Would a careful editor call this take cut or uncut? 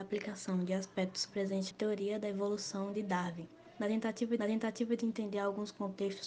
cut